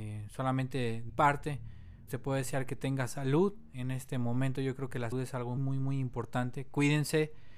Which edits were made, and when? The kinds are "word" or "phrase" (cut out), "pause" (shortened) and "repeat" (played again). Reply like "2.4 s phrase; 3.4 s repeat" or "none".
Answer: 1.1 s word; 2.1 s word; 3.7 s word; 5.1 s word; 5.6 s word